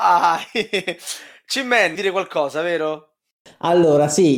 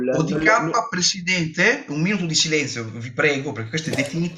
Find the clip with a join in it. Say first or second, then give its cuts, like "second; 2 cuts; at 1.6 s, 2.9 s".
first; 1 cut; at 1.9 s